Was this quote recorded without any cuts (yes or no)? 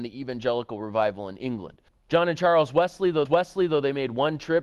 no